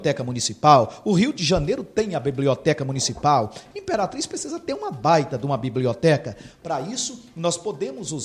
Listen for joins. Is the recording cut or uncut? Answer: uncut